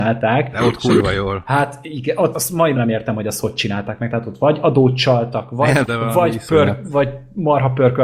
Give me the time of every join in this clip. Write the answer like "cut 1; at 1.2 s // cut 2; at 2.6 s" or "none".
cut 1; at 2.3 s // cut 2; at 2.7 s // cut 3; at 5.9 s